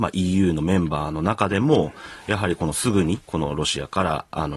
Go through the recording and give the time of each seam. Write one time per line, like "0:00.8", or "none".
0:03.2